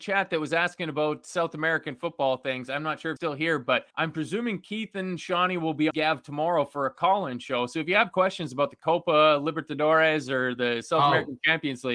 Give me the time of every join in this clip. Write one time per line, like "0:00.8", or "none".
0:03.2
0:03.9
0:05.9